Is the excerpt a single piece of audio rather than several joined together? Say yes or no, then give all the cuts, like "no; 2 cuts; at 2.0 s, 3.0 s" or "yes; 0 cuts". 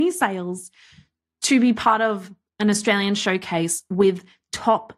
yes; 0 cuts